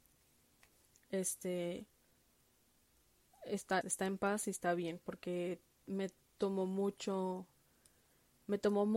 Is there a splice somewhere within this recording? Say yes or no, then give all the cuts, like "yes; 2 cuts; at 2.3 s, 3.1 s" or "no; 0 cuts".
yes; 2 cuts; at 3.8 s, 5.7 s